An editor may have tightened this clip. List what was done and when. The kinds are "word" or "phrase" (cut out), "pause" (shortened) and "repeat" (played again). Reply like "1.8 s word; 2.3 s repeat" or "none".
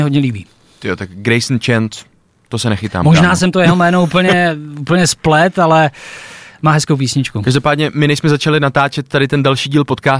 none

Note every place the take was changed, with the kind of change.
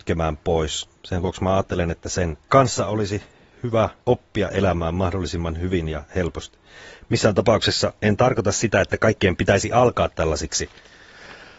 1.0 s pause; 2.4 s pause; 4.0 s pause; 8.0 s pause

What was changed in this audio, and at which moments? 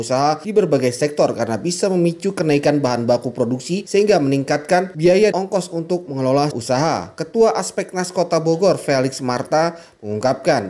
5.3 s word; 6.5 s word

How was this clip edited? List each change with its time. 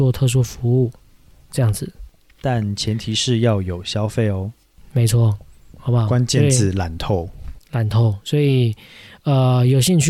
none

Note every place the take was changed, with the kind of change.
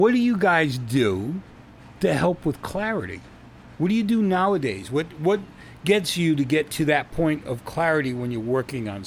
1.9 s pause; 3.7 s pause

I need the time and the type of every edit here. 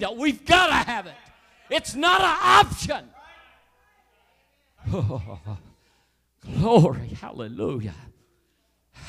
none

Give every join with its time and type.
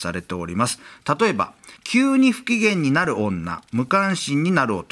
1.8 s pause

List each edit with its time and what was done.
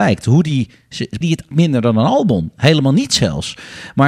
1.2 s phrase; 1.5 s phrase

